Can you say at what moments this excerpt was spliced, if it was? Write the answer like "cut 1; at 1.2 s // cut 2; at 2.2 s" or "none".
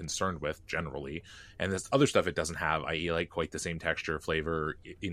none